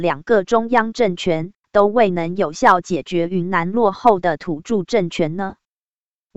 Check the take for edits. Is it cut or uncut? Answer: uncut